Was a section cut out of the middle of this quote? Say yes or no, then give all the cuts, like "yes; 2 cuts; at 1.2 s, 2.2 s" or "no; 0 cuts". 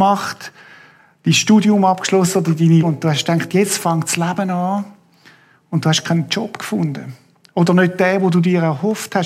yes; 1 cut; at 2.8 s